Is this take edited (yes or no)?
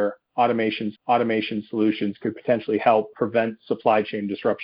yes